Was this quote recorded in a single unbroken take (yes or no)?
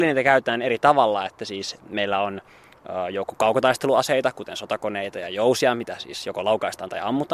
yes